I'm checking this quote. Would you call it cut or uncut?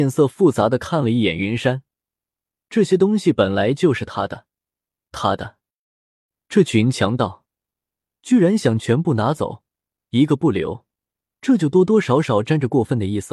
uncut